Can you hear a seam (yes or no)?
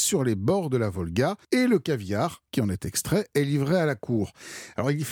yes